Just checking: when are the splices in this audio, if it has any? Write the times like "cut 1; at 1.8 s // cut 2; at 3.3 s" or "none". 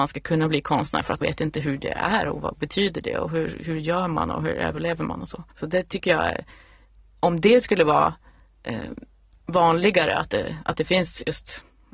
cut 1; at 1.2 s // cut 2; at 5.5 s

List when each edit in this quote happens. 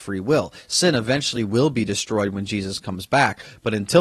none

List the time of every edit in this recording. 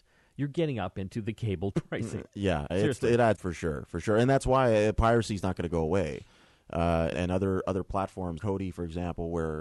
cut 1; at 1.7 s // cut 2; at 2.7 s // cut 3; at 3.3 s // cut 4; at 7.1 s // cut 5; at 8.4 s

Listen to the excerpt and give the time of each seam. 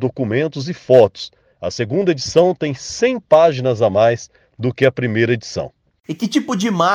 none

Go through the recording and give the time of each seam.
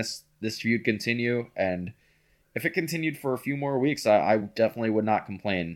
none

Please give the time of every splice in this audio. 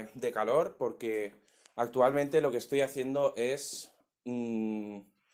none

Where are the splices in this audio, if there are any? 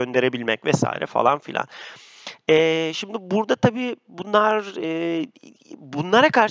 none

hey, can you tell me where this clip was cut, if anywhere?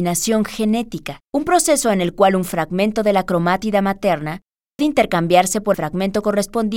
cut 1; at 1.2 s // cut 2; at 4.8 s // cut 3; at 5.7 s

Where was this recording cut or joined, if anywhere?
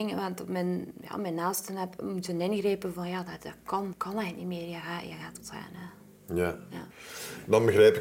cut 1; at 3.9 s // cut 2; at 5.4 s

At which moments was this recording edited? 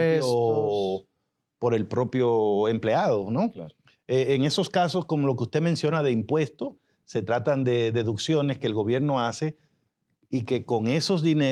none

